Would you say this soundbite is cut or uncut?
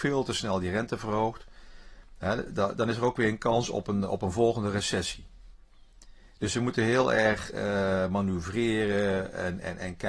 uncut